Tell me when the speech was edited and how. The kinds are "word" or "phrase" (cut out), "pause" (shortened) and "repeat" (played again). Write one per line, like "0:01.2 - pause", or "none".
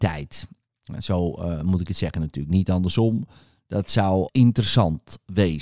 0:04.3 - word